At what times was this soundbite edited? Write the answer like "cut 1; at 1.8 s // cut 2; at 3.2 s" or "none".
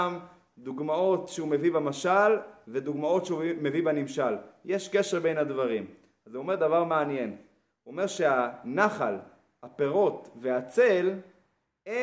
none